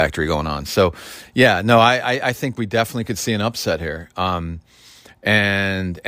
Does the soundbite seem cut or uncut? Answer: uncut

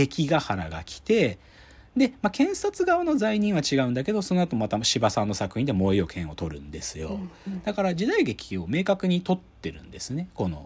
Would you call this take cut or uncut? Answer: uncut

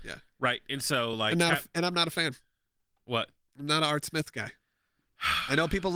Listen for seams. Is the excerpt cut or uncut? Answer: uncut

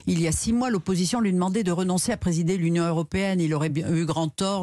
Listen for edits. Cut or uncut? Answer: uncut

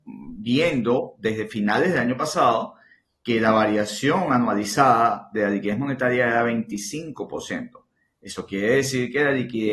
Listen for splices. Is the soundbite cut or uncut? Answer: uncut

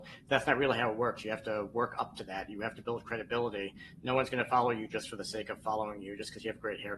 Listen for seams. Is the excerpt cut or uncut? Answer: uncut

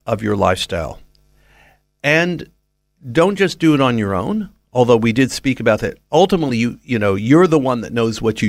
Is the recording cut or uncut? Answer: uncut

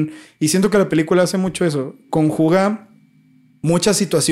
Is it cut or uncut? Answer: uncut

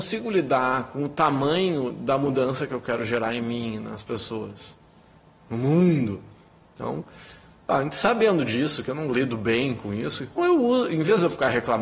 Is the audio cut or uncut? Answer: cut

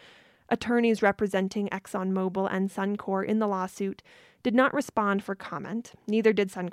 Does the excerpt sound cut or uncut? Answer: uncut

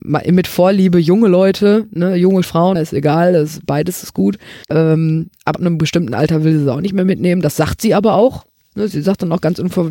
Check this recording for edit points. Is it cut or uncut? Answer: cut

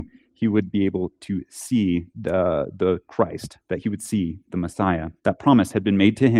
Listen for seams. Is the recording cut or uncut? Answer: cut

